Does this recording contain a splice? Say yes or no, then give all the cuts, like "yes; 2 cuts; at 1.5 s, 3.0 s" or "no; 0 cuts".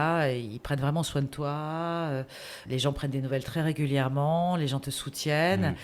yes; 1 cut; at 2.7 s